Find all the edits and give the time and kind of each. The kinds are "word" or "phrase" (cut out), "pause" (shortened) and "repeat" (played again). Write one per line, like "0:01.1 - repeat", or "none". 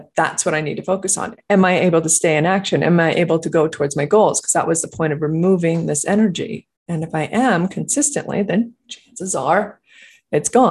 0:06.8 - pause
0:08.8 - pause